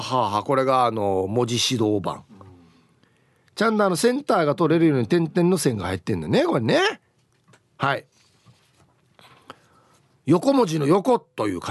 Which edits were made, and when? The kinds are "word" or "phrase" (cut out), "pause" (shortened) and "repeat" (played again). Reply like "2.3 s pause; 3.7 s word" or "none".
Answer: none